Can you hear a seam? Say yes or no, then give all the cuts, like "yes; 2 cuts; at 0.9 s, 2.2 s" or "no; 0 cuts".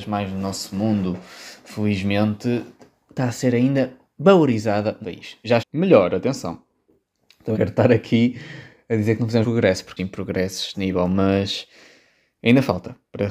yes; 7 cuts; at 3.1 s, 5.0 s, 5.6 s, 7.5 s, 9.4 s, 10.0 s, 10.7 s